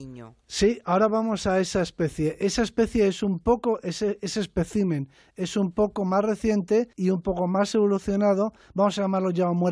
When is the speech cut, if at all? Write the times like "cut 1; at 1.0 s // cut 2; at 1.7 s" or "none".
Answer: cut 1; at 6.9 s